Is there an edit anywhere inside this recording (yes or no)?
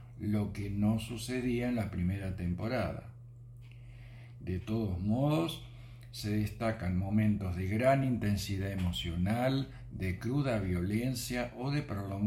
no